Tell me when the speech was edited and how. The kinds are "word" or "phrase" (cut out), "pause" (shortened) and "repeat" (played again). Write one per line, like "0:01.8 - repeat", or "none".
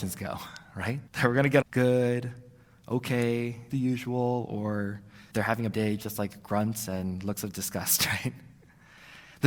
0:01.1 - pause
0:01.6 - phrase
0:03.7 - word
0:05.3 - word
0:05.7 - word

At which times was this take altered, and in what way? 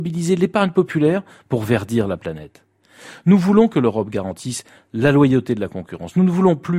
none

